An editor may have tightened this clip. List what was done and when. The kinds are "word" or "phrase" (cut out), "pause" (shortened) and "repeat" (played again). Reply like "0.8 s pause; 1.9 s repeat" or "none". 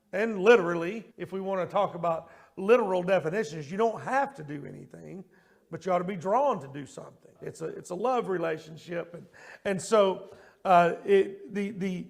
1.1 s pause; 7.3 s pause